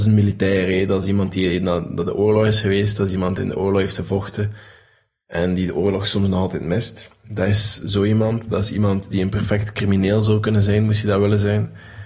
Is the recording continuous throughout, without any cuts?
yes; 0 cuts

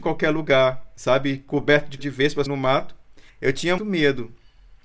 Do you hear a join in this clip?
yes; 4 cuts; at 2.0 s, 2.5 s, 3.3 s, 3.8 s

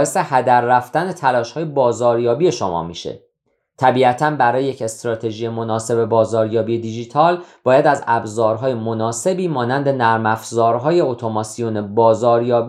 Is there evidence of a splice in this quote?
no; 0 cuts

